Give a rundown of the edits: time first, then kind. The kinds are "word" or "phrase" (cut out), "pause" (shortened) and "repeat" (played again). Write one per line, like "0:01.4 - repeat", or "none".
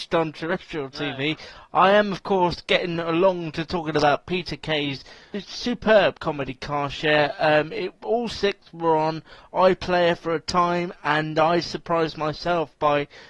none